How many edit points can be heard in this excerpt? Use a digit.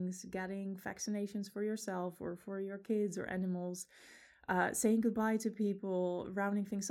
0